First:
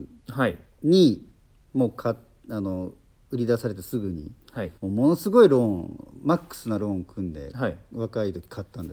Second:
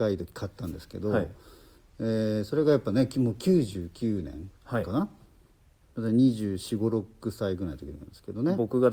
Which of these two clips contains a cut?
first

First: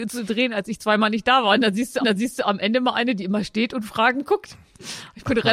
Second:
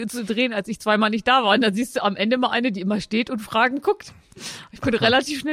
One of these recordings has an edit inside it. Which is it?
first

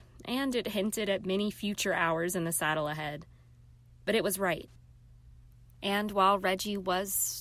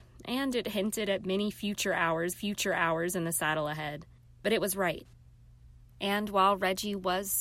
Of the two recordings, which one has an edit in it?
second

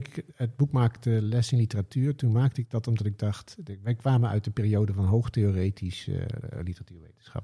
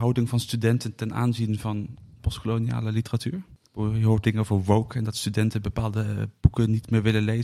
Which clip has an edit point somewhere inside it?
second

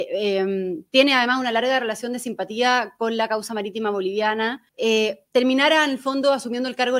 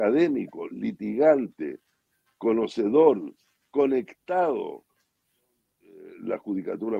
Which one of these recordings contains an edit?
first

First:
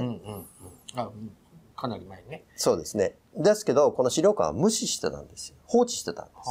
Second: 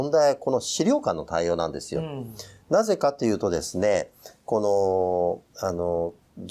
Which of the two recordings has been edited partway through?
second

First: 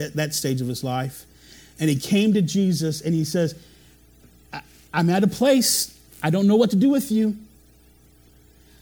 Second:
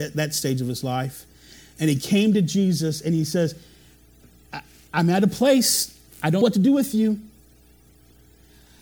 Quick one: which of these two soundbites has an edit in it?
second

